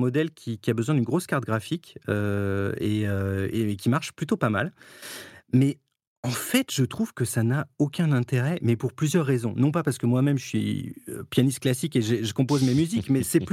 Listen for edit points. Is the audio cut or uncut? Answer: uncut